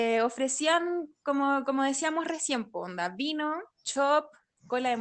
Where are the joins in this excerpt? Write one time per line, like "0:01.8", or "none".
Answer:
0:03.7